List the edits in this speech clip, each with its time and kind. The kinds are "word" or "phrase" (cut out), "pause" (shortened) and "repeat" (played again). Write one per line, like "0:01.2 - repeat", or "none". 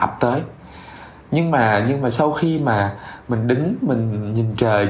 none